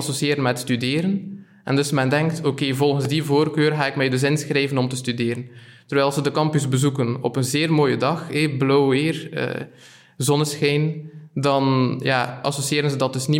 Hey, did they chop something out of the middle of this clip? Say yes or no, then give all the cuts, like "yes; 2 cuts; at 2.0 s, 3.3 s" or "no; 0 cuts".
no; 0 cuts